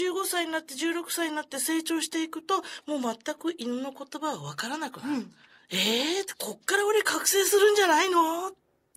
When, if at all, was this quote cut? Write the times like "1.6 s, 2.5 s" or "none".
5.6 s